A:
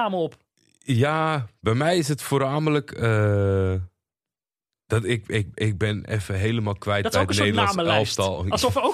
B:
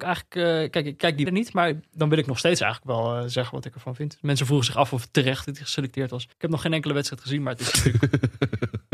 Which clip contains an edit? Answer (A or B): B